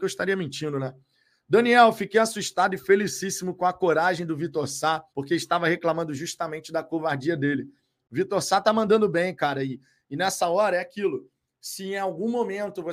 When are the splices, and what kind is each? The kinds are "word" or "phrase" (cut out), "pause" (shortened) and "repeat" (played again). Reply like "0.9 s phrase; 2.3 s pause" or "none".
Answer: 5.1 s pause